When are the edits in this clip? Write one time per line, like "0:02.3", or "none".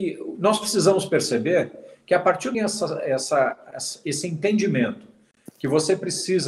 0:02.5
0:03.7